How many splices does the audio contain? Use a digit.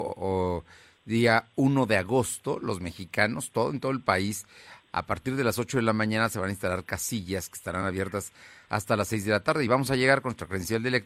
0